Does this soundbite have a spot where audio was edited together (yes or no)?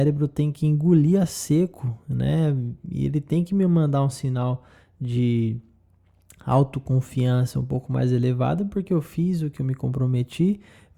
no